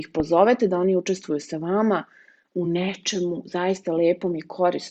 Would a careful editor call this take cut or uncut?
uncut